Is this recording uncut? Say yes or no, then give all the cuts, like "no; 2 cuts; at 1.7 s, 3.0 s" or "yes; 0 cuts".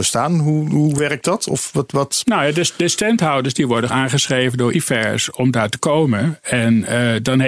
no; 2 cuts; at 3.9 s, 4.7 s